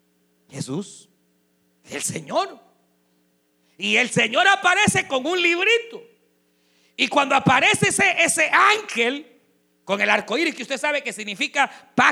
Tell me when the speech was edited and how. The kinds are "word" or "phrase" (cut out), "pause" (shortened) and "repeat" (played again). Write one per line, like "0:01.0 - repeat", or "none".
none